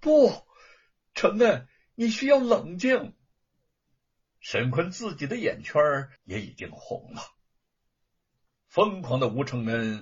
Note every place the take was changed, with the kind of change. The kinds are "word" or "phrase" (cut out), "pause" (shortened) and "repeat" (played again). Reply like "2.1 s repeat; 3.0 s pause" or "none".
6.2 s pause